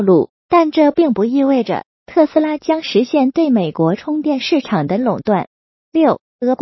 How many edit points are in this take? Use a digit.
0